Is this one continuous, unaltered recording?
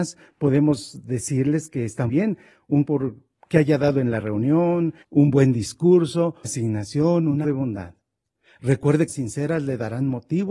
no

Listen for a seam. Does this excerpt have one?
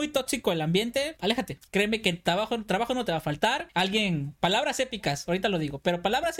no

